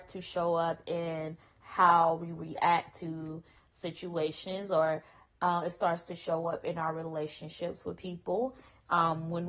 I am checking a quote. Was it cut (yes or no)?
no